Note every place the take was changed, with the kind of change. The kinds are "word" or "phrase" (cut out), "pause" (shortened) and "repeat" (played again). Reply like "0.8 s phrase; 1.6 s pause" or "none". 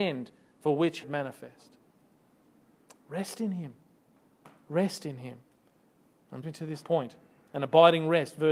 1.0 s phrase; 6.4 s word; 6.8 s word